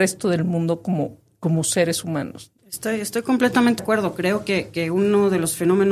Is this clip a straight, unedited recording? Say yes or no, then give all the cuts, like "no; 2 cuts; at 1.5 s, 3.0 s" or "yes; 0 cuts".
no; 3 cuts; at 1.2 s, 2.6 s, 3.8 s